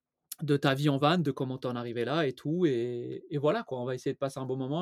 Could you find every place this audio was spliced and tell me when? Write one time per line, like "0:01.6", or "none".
none